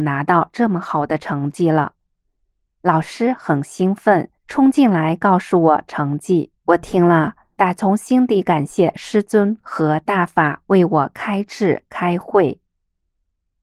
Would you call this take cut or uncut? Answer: cut